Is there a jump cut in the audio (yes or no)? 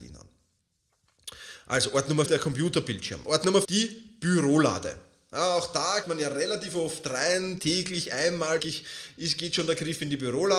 yes